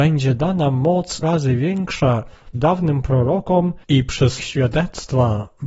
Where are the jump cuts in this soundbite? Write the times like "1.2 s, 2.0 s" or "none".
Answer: 1.2 s, 2.5 s, 3.8 s, 4.4 s